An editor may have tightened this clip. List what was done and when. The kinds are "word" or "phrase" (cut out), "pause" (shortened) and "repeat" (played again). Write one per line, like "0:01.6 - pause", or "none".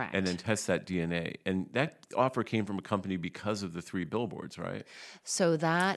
none

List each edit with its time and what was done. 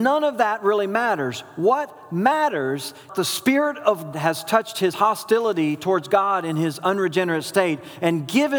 0:03.1 - phrase
0:04.1 - word
0:04.9 - phrase

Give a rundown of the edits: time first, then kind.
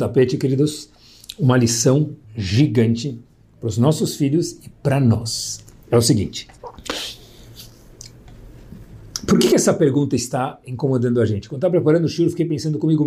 0:02.2 - pause
0:06.6 - pause

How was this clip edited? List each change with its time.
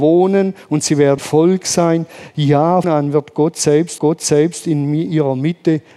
0:01.2 - word
0:02.8 - phrase
0:04.0 - repeat

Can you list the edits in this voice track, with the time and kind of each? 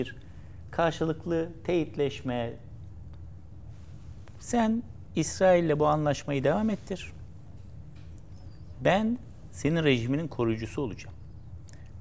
none

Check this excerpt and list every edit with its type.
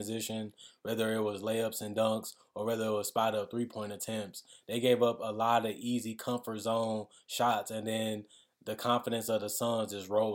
none

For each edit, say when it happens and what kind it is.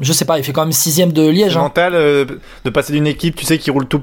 none

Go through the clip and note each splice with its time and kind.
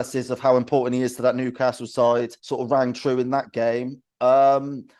0:02.4 - pause

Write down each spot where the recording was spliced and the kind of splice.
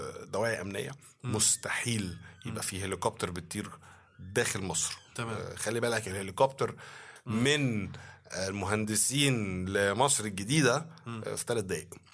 none

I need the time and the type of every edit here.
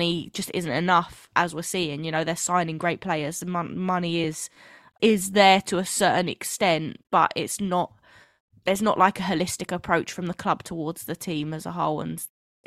none

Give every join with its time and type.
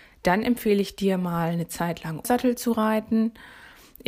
0:02.2 - word

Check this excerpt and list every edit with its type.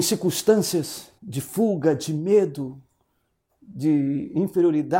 0:01.2 - pause

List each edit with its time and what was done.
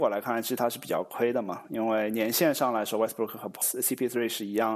none

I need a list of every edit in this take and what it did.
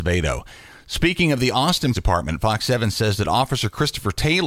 0:01.9 - word

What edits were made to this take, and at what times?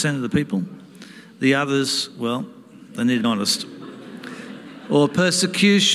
0:03.2 - word

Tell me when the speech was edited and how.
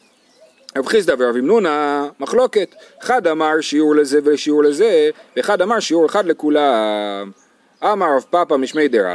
none

